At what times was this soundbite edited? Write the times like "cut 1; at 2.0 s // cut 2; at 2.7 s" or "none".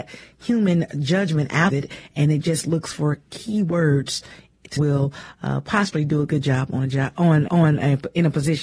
cut 1; at 1.7 s // cut 2; at 4.8 s // cut 3; at 7.5 s